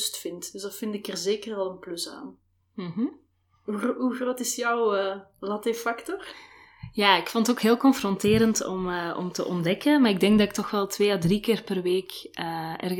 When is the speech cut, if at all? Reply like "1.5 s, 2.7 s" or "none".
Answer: none